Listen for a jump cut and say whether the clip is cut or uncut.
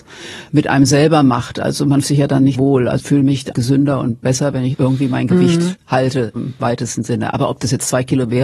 cut